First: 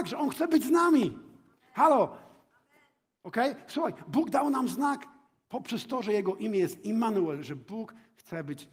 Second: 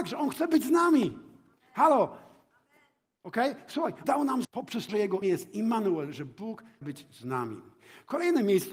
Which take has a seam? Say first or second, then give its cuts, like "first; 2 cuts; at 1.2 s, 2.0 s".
second; 5 cuts; at 4.0 s, 4.4 s, 4.9 s, 5.2 s, 6.8 s